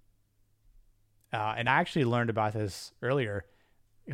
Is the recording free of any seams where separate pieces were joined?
yes; 0 cuts

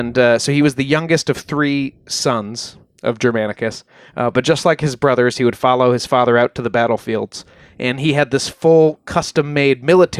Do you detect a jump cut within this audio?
no; 0 cuts

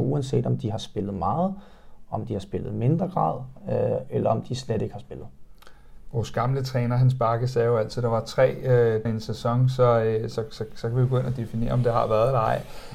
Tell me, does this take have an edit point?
yes; 1 cut; at 9.1 s

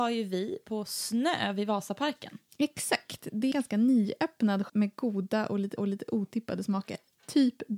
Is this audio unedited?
no; 3 cuts; at 3.5 s, 4.7 s, 5.8 s

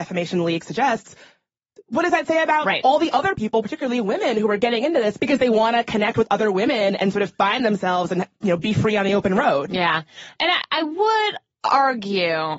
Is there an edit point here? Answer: no; 0 cuts

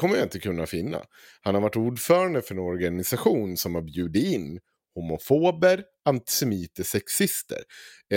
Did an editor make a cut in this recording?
no; 0 cuts

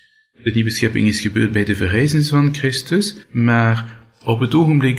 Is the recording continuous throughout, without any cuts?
no; 1 cut; at 3.2 s

